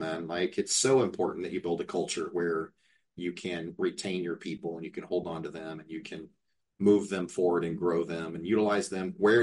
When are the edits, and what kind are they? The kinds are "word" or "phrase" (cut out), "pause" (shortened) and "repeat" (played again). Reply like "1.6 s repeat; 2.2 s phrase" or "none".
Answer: none

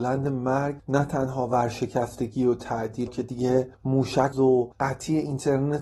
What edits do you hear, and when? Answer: 3.1 s word; 4.3 s phrase

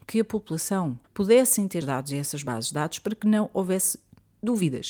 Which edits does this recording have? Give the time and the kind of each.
1.0 s pause; 1.8 s phrase

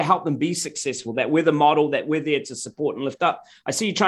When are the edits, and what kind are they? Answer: none

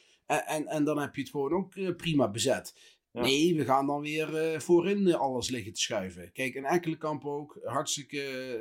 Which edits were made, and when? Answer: none

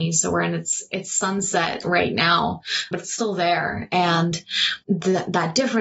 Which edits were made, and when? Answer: 2.9 s word; 4.8 s pause

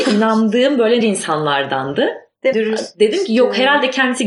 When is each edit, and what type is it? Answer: 1.0 s word; 2.5 s word

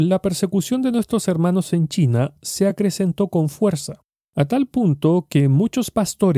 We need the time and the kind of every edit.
none

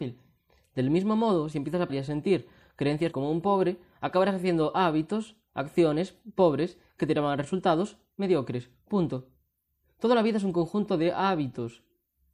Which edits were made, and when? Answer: 1.9 s word; 3.1 s word

